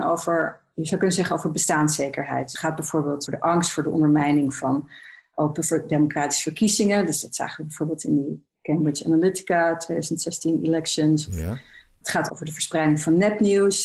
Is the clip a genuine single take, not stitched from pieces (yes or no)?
no